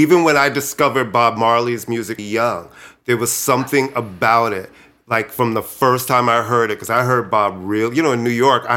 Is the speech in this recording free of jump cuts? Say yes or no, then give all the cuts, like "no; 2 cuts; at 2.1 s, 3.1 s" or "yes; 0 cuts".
no; 1 cut; at 2.2 s